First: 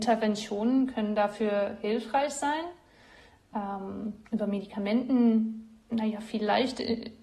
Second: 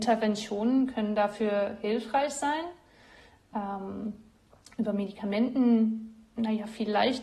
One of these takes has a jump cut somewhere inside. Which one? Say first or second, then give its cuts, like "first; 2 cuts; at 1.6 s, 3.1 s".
first; 1 cut; at 4.3 s